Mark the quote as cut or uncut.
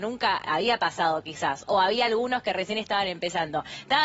uncut